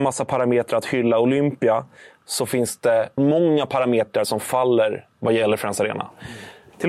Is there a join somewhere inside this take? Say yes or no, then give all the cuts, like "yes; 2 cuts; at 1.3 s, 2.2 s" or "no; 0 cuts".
yes; 1 cut; at 3.2 s